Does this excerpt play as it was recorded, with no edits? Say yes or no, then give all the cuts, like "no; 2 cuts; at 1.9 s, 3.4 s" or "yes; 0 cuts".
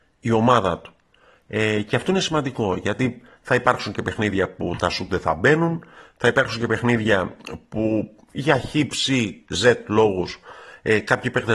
yes; 0 cuts